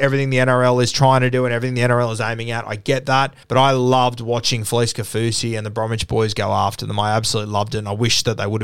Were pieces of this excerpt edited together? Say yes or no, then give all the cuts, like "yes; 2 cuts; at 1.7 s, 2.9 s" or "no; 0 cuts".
yes; 1 cut; at 3.4 s